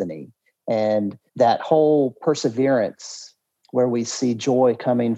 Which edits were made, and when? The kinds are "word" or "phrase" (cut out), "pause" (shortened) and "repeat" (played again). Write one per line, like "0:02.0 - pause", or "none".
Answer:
0:01.3 - pause
0:03.5 - pause